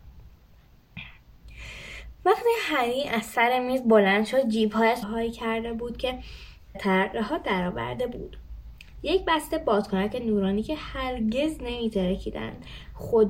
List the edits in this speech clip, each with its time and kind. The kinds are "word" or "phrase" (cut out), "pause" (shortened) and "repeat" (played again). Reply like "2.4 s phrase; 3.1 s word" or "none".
5.0 s phrase; 6.7 s phrase